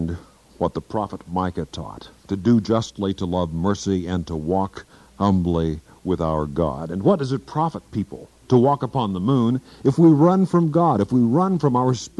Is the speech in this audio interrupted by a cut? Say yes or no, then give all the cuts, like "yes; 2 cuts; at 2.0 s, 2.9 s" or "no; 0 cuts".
no; 0 cuts